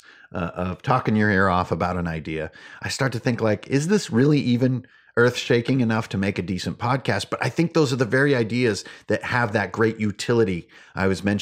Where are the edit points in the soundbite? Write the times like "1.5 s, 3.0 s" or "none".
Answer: none